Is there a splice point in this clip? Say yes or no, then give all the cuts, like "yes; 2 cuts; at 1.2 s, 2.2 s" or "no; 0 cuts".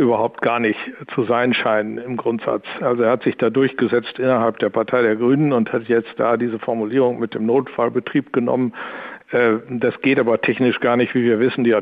no; 0 cuts